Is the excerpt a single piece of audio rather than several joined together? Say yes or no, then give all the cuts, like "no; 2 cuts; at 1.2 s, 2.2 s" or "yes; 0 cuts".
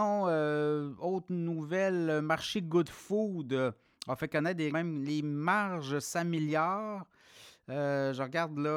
no; 1 cut; at 4.7 s